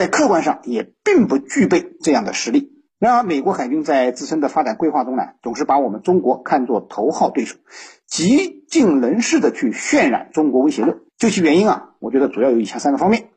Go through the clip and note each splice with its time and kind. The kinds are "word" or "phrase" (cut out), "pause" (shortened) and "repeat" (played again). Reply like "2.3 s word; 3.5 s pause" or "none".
11.1 s pause